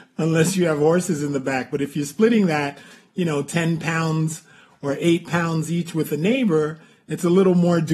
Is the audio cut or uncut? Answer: uncut